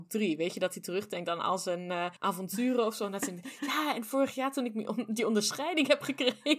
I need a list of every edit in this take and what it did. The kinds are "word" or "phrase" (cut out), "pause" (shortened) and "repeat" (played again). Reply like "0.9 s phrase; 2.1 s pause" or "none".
2.2 s pause